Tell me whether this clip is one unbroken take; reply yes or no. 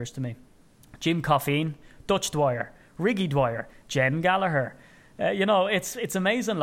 yes